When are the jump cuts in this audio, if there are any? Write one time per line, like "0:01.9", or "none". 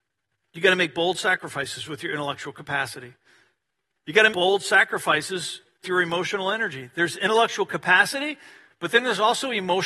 0:04.3
0:05.8